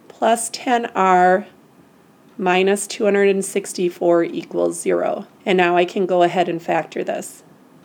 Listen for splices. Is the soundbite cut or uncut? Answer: cut